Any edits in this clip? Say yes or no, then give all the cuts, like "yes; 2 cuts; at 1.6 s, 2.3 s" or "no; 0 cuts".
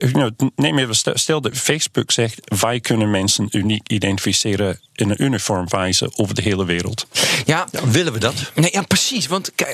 no; 0 cuts